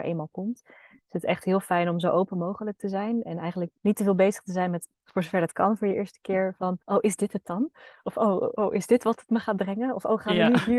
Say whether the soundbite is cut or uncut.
cut